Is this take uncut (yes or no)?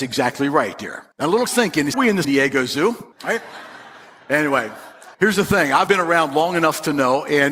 no